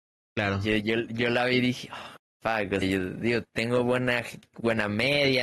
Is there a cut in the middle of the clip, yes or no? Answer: yes